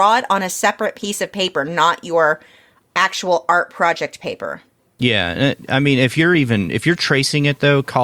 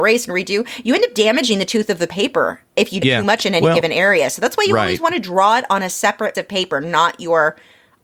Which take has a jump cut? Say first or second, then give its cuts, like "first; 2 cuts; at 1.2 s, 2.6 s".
second; 3 cuts; at 2.7 s, 3.0 s, 6.3 s